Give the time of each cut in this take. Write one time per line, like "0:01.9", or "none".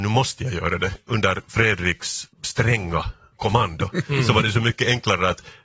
0:02.3

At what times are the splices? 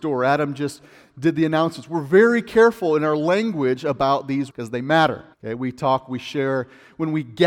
0:04.5
0:05.3

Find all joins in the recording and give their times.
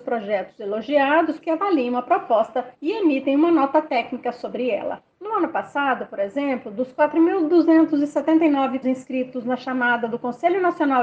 0:01.4
0:02.7
0:05.1
0:08.8

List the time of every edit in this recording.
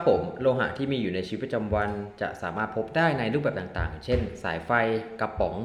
none

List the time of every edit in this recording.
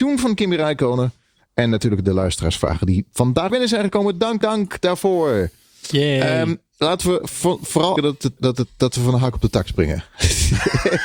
0:03.5
0:04.4
0:08.0
0:08.4

